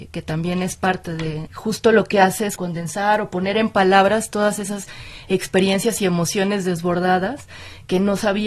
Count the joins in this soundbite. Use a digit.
2